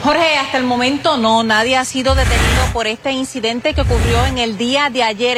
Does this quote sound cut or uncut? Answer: uncut